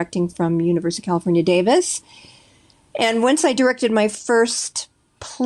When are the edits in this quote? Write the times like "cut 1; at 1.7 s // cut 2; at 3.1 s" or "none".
none